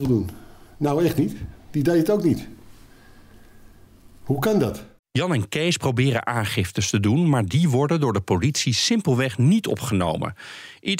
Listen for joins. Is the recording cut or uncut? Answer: cut